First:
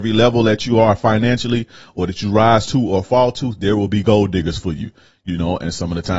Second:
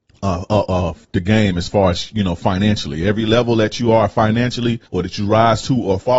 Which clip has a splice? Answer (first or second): second